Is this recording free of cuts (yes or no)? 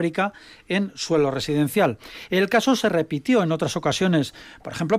yes